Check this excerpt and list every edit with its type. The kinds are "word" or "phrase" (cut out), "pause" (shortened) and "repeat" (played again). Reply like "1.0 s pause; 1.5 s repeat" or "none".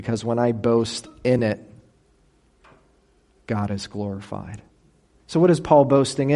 none